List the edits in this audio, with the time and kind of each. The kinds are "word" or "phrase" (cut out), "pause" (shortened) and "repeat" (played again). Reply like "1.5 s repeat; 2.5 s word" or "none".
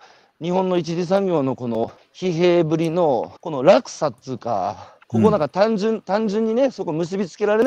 2.0 s pause; 3.4 s pause; 5.0 s pause